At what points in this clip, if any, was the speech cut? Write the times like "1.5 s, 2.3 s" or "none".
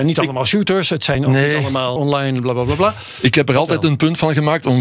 2.0 s